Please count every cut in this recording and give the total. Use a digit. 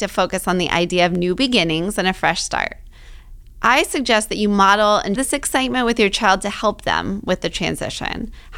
1